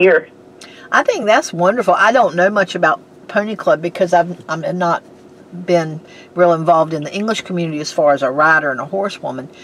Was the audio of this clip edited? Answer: no; 0 cuts

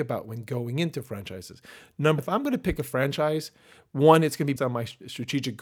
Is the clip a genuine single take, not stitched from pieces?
no; 2 cuts; at 2.2 s, 4.6 s

